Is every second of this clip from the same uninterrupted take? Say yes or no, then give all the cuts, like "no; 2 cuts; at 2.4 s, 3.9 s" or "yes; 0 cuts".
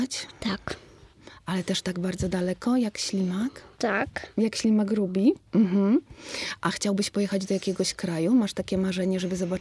no; 1 cut; at 3.7 s